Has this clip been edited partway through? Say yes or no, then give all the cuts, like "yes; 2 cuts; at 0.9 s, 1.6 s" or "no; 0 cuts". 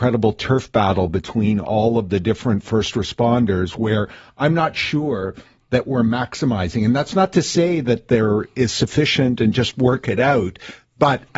no; 0 cuts